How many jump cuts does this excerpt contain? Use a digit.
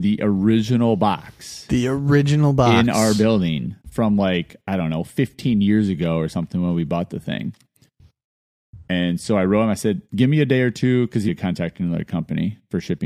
3